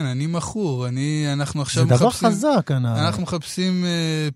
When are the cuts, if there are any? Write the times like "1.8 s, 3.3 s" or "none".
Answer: 3.2 s